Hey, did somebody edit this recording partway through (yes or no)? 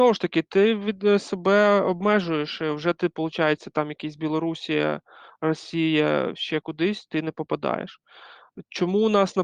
no